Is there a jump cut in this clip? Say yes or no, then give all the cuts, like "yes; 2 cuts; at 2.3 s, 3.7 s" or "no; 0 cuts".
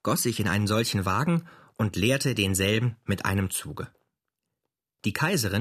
no; 0 cuts